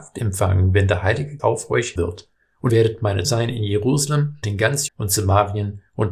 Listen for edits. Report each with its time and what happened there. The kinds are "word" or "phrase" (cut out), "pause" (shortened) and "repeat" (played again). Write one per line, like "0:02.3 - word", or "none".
0:01.4 - word
0:02.0 - word
0:02.7 - word
0:03.2 - word
0:04.4 - word
0:04.9 - word